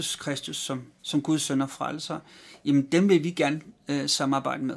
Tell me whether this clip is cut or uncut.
uncut